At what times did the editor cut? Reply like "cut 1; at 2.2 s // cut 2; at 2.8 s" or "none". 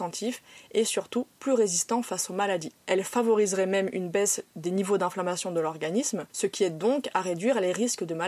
cut 1; at 2.8 s // cut 2; at 6.3 s